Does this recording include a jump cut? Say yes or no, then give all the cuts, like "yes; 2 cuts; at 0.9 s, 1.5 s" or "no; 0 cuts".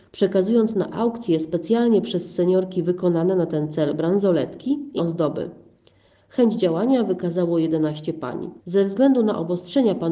yes; 2 cuts; at 5.0 s, 8.6 s